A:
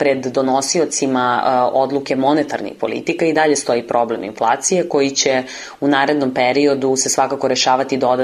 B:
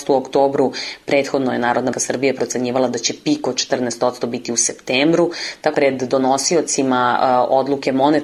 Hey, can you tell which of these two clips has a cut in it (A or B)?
B